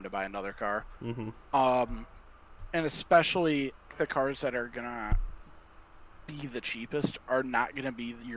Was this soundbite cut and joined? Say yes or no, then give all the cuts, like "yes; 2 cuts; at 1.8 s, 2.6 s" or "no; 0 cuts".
yes; 1 cut; at 3.9 s